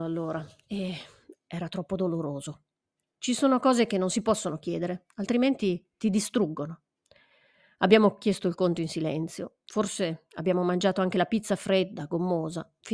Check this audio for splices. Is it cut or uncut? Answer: uncut